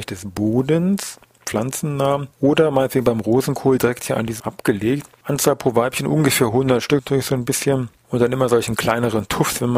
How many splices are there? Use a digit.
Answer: 2